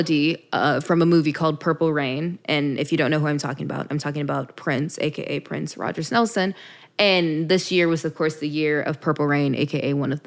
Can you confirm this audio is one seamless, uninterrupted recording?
yes; 0 cuts

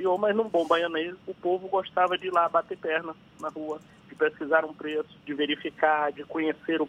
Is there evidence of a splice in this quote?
yes; 2 cuts; at 1.2 s, 5.2 s

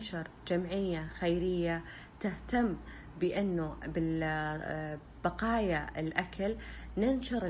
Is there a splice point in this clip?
no; 0 cuts

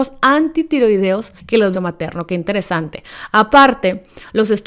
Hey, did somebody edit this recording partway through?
yes; 2 cuts; at 1.4 s, 1.7 s

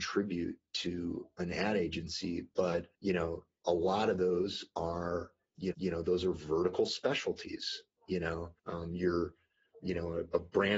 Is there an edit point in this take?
yes; 3 cuts; at 2.9 s, 5.7 s, 8.6 s

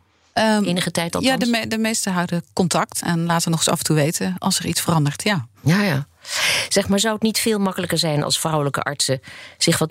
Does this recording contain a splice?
yes; 1 cut; at 3.0 s

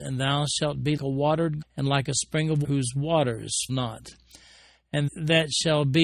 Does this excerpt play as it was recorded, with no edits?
no; 5 cuts; at 1.0 s, 1.6 s, 2.6 s, 3.7 s, 5.1 s

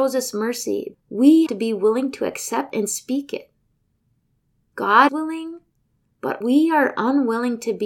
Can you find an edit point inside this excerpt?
yes; 5 cuts; at 0.9 s, 1.5 s, 2.7 s, 5.1 s, 6.4 s

